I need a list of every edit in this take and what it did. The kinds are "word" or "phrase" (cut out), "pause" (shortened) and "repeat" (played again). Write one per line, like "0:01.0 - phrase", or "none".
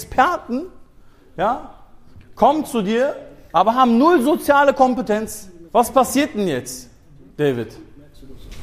0:05.7 - pause